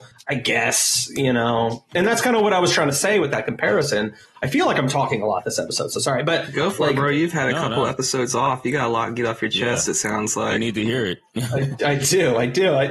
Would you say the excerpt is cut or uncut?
uncut